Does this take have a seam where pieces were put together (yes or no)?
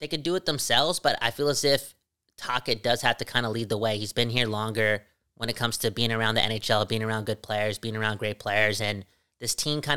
no